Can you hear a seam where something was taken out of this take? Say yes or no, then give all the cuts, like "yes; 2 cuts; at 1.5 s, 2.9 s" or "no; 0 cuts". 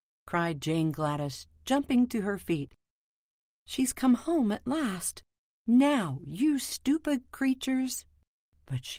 no; 0 cuts